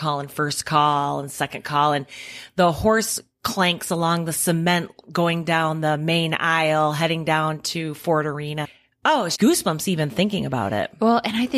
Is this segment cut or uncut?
cut